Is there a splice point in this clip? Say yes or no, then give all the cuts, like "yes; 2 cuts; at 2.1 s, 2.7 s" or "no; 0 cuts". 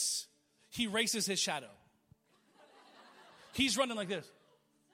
no; 0 cuts